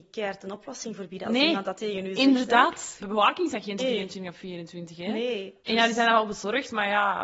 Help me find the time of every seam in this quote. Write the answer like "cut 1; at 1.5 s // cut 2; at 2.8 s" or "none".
cut 1; at 3.0 s // cut 2; at 3.8 s // cut 3; at 5.6 s

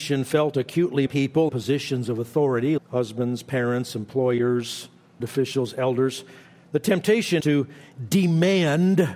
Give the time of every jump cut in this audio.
cut 1; at 1.1 s // cut 2; at 1.5 s // cut 3; at 2.8 s // cut 4; at 5.2 s // cut 5; at 7.4 s

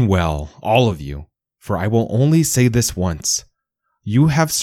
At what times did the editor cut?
none

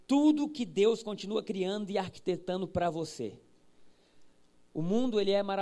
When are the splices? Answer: none

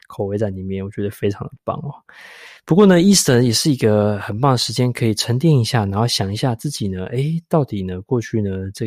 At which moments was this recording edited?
cut 1; at 2.6 s

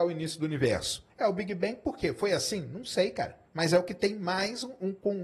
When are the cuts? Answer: cut 1; at 1.1 s // cut 2; at 3.5 s

